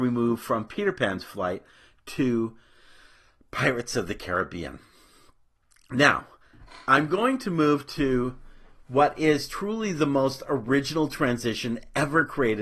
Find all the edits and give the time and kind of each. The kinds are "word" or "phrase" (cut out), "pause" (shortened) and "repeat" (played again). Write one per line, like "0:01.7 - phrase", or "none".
none

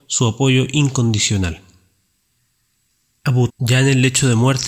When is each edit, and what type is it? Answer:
0:03.5 - word

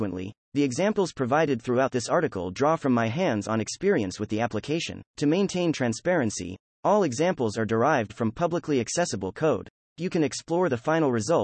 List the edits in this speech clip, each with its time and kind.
0:05.1 - pause
0:09.8 - pause

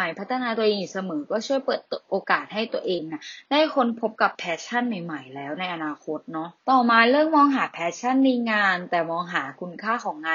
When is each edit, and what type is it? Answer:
0:06.6 - pause

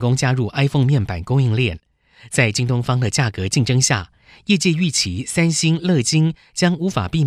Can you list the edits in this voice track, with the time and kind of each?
none

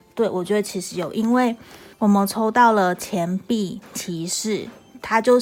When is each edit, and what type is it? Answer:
0:01.9 - pause

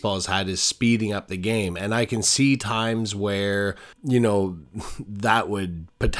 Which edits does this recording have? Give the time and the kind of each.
0:03.9 - pause

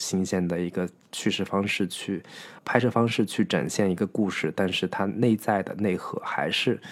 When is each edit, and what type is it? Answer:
0:02.6 - word

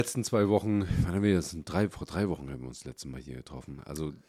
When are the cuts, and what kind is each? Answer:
none

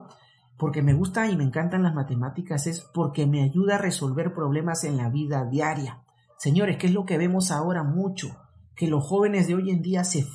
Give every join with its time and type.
none

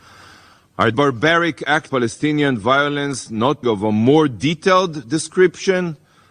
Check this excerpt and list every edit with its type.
0:00.9 - word
0:01.9 - word
0:03.6 - word

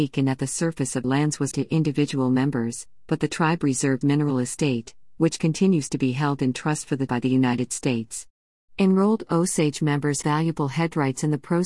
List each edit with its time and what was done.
0:01.0 - word
0:01.5 - word
0:04.0 - word
0:07.1 - word
0:10.2 - word

